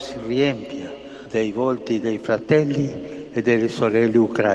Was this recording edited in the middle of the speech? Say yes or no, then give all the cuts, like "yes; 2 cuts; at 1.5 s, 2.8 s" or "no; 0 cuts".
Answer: no; 0 cuts